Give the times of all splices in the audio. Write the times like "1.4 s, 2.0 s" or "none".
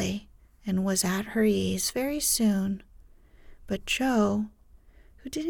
none